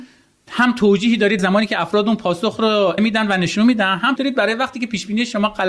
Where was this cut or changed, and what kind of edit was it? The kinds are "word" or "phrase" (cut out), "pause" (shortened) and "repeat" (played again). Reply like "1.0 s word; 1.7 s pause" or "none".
1.4 s word; 3.0 s word; 4.2 s word